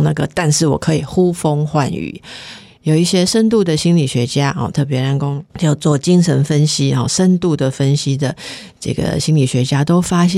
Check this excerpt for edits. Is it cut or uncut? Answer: cut